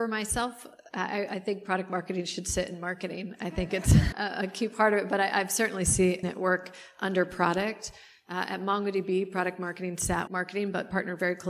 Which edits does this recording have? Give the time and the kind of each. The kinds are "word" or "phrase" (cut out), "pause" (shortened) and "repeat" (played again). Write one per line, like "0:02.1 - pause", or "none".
0:04.1 - word
0:06.2 - word
0:10.3 - word